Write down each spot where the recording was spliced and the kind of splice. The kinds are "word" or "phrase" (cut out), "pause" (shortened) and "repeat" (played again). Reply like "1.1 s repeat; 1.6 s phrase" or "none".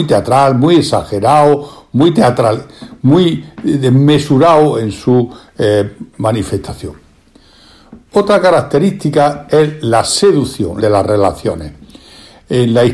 10.8 s phrase

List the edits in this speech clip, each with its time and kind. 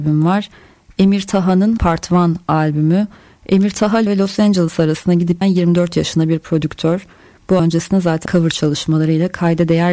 1.8 s word; 4.1 s word; 5.4 s word; 7.6 s word; 8.3 s word

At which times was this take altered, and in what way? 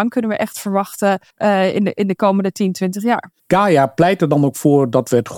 1.3 s pause; 3.4 s pause

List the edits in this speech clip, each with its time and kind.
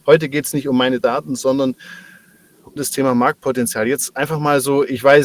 2.8 s word

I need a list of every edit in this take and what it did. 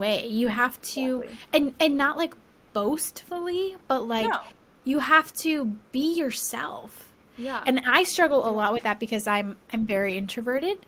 none

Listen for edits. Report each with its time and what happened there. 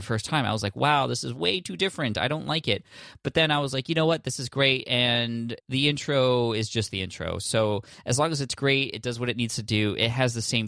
5.6 s pause

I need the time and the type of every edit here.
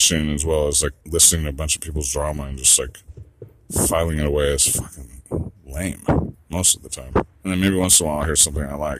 1.0 s pause; 7.3 s pause

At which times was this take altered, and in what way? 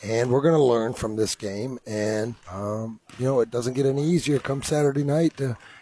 2.4 s pause

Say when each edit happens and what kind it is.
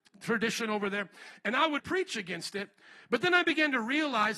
1.8 s word

